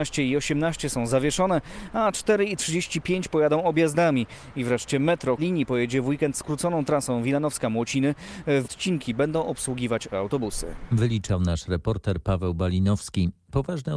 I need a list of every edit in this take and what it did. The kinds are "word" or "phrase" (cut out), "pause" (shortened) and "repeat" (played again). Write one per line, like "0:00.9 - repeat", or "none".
0:05.4 - phrase
0:08.6 - word
0:10.1 - word